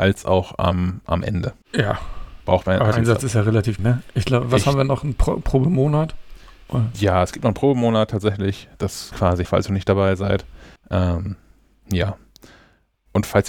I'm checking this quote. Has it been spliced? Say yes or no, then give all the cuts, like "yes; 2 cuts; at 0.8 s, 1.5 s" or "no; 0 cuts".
yes; 6 cuts; at 1.6 s, 2.9 s, 3.8 s, 9.1 s, 9.4 s, 10.8 s